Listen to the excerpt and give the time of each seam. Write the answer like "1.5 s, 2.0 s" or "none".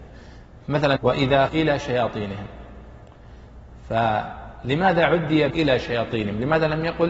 1.0 s, 1.5 s, 5.5 s